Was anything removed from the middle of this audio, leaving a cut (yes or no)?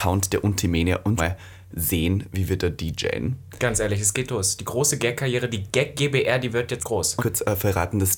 yes